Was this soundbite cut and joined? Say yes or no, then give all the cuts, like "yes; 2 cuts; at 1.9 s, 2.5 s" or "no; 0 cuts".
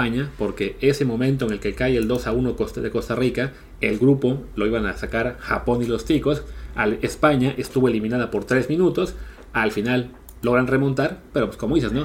no; 0 cuts